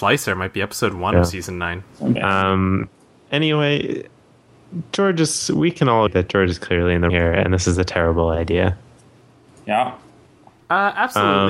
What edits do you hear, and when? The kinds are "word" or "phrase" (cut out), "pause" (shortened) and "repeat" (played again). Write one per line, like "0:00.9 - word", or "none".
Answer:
0:02.2 - word
0:06.1 - word
0:07.1 - word